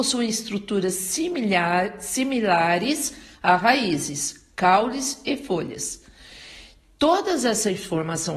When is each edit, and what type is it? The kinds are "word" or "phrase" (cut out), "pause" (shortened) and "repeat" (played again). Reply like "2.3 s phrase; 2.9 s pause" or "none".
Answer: none